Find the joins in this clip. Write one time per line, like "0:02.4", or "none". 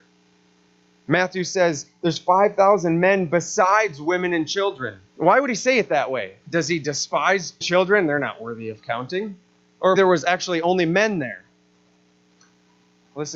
0:05.1
0:06.4
0:07.6
0:10.0